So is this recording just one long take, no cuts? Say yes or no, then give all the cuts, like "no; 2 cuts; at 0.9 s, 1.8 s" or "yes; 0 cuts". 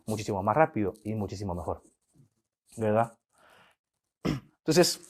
yes; 0 cuts